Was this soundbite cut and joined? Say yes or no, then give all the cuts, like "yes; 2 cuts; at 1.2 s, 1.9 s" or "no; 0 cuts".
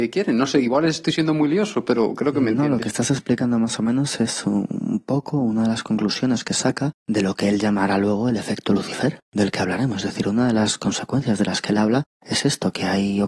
yes; 3 cuts; at 7.0 s, 9.2 s, 12.1 s